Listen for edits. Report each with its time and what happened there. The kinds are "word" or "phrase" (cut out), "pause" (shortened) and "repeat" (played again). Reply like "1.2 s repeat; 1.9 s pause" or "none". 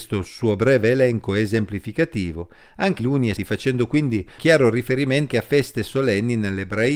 3.0 s word; 3.4 s word; 4.4 s word; 5.3 s word